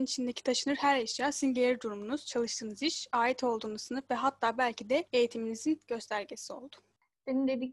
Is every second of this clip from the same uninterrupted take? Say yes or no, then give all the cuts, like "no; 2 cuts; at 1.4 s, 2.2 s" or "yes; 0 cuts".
yes; 0 cuts